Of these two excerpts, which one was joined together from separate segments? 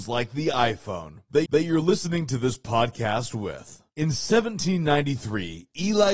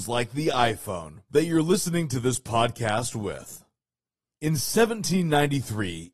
first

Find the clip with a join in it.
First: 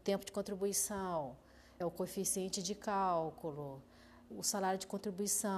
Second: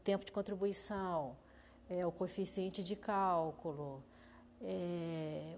first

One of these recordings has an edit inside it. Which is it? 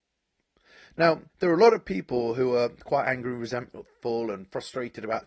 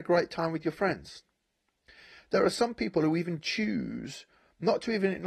first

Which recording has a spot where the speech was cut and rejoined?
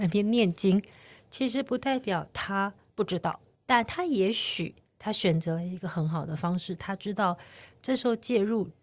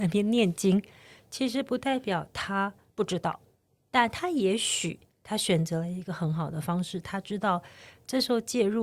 first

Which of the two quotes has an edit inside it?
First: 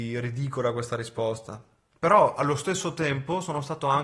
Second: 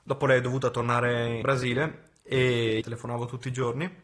second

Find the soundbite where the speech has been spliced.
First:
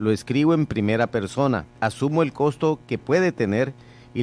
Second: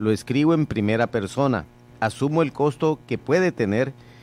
first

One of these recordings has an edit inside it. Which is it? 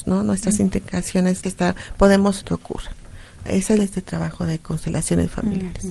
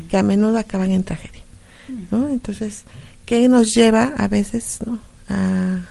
first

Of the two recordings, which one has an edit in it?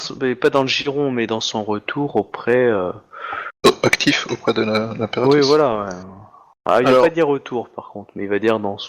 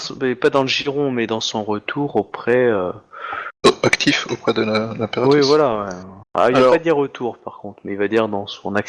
second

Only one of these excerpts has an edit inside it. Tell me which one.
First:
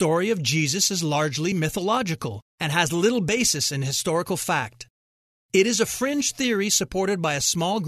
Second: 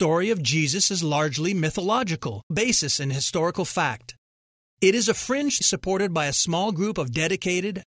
second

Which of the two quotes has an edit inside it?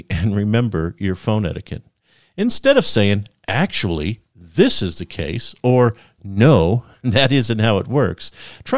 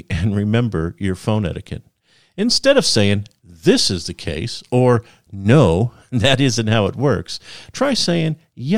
second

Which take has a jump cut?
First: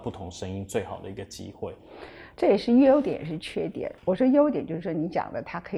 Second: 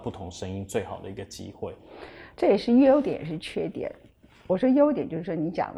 first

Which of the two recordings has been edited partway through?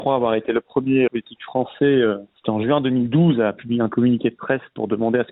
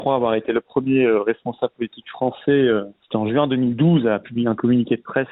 first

